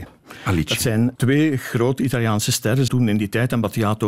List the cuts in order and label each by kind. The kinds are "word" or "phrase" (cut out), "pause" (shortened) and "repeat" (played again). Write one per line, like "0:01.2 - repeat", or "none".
0:01.2 - word
0:02.9 - word